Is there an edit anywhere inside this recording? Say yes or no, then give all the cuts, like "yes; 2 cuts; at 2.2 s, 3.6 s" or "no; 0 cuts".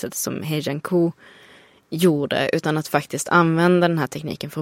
no; 0 cuts